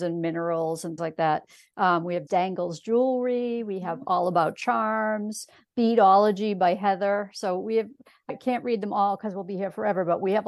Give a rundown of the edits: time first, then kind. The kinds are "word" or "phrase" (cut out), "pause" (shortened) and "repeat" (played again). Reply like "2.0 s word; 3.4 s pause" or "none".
1.0 s word; 2.3 s word; 8.3 s word